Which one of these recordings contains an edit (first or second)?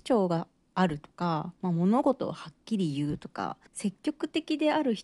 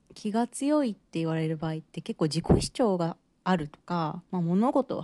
first